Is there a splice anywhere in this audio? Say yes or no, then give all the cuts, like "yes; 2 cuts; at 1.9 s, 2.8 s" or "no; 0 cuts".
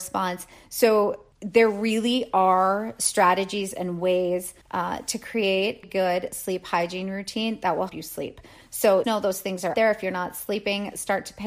yes; 6 cuts; at 1.3 s, 4.6 s, 5.8 s, 7.9 s, 9.0 s, 9.7 s